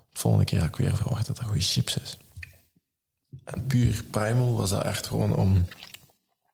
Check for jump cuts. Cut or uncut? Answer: uncut